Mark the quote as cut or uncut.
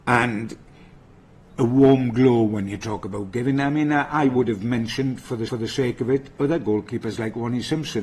cut